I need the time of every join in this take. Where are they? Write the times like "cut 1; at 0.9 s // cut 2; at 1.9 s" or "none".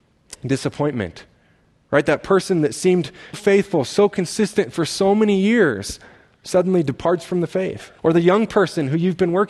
cut 1; at 3.3 s // cut 2; at 8.0 s